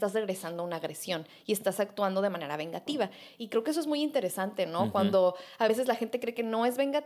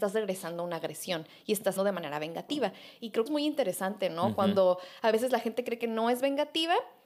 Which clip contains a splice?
second; 2 cuts; at 1.8 s, 3.3 s

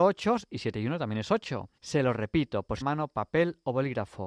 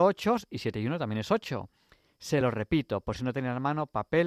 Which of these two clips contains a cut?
first; 2 cuts; at 1.8 s, 2.8 s

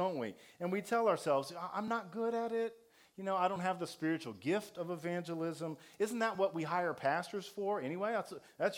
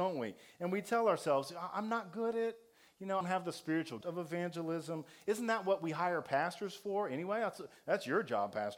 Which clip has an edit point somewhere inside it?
second; 3 cuts; at 2.3 s, 3.2 s, 4.0 s

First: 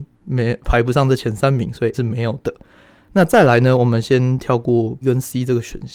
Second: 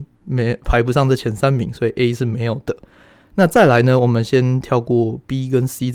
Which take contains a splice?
first; 2 cuts; at 1.9 s, 5.0 s

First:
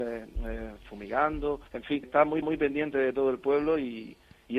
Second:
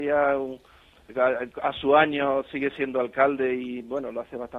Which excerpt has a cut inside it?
first; 3 cuts; at 1.7 s, 2.0 s, 2.4 s

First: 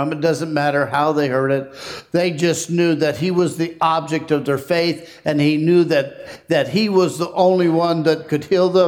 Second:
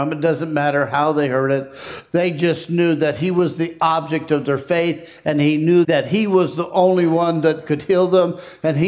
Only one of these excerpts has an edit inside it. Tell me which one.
second; 1 cut; at 5.8 s

